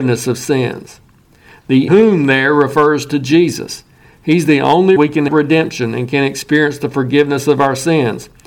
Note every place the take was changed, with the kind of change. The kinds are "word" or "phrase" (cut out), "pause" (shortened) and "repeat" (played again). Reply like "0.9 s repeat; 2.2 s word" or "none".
1.9 s word; 5.0 s word; 5.3 s word